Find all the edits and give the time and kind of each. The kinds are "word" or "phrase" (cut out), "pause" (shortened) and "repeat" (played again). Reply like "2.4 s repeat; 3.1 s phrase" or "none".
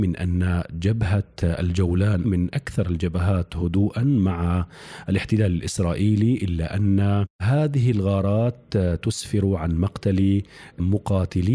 2.2 s word; 7.3 s pause